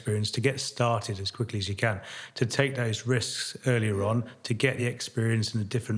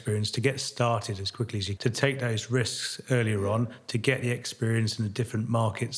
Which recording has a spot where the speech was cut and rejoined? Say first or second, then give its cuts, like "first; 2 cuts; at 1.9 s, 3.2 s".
second; 1 cut; at 1.8 s